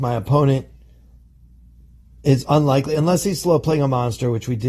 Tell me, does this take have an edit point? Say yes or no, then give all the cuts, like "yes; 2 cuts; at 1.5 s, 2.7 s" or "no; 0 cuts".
no; 0 cuts